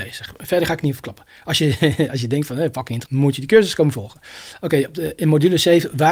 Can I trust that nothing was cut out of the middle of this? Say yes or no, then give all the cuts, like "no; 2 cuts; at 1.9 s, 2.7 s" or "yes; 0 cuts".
no; 1 cut; at 3.0 s